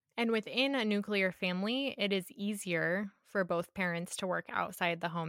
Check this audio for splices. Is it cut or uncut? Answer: uncut